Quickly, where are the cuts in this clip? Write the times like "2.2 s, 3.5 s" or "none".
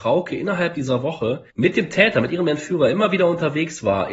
1.5 s